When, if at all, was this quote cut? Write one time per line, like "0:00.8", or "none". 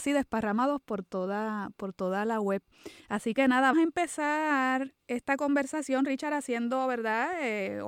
0:03.7
0:05.0